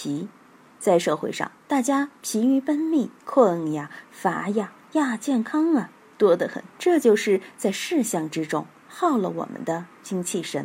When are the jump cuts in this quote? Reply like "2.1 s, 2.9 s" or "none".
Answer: 1.6 s, 3.2 s, 6.7 s